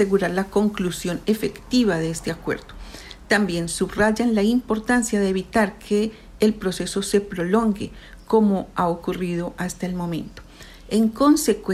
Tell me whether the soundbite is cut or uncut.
uncut